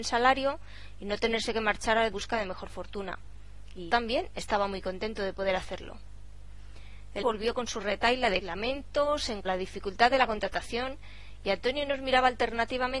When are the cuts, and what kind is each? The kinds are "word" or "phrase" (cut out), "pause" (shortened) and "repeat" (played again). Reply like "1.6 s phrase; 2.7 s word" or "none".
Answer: 2.1 s phrase; 3.9 s word; 7.2 s word; 8.4 s word; 9.4 s phrase